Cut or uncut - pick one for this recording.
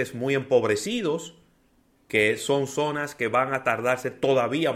uncut